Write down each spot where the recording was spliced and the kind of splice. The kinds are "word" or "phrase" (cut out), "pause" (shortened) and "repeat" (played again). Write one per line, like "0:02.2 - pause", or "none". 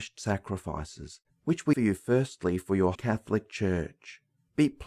0:01.7 - word
0:02.9 - word